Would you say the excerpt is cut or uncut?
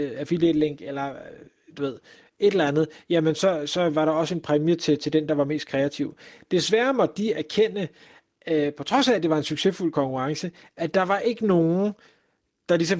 uncut